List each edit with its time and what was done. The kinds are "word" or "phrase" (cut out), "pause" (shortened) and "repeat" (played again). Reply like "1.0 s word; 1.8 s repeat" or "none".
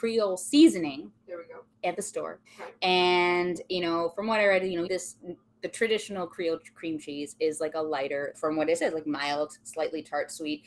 1.2 s pause; 2.5 s pause; 4.9 s word; 8.3 s word